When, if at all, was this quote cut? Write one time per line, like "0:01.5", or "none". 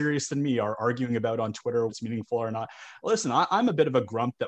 0:01.9